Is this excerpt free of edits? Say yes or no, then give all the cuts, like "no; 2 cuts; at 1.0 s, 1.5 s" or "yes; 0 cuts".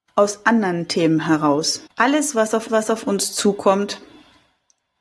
no; 2 cuts; at 1.9 s, 2.7 s